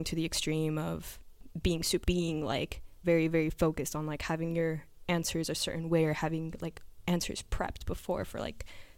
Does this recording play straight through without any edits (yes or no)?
no